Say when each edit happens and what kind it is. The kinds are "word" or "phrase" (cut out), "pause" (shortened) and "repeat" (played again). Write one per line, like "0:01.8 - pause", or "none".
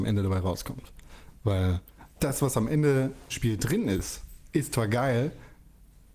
0:02.1 - pause
0:03.3 - word
0:04.4 - pause